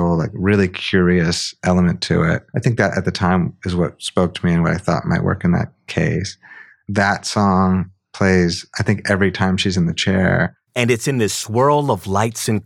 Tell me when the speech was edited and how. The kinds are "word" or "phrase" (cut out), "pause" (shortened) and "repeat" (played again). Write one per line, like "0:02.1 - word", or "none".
0:02.5 - pause